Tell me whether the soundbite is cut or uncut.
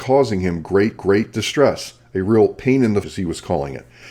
cut